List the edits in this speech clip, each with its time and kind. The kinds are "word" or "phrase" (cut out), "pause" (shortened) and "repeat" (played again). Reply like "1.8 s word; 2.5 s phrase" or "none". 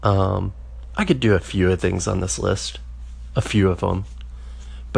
1.8 s word